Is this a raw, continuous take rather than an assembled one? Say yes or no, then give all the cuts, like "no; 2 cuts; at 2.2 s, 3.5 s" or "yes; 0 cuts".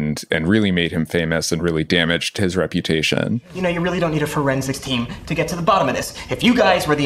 yes; 0 cuts